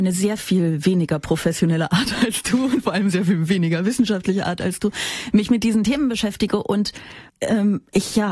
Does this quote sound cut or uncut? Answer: cut